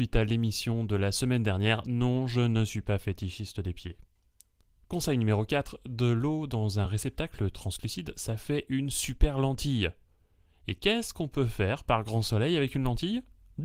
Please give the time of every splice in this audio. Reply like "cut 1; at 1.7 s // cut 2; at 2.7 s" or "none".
none